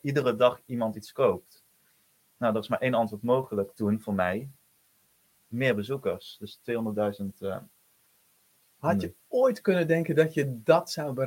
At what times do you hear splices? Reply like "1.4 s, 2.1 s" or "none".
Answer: none